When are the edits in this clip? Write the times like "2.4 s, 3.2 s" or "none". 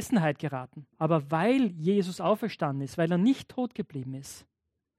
0.9 s